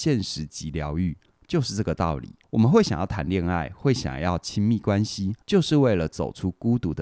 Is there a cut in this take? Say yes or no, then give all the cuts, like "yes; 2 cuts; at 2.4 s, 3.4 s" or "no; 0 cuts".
yes; 2 cuts; at 2.4 s, 5.4 s